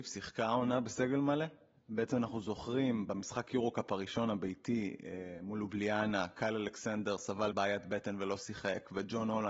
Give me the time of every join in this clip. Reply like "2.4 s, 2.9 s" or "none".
7.5 s